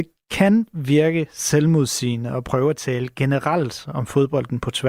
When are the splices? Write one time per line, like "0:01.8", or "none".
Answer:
none